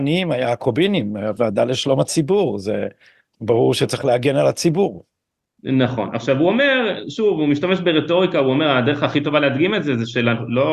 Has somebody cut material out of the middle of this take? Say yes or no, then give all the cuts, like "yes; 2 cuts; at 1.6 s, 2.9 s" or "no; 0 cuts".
no; 0 cuts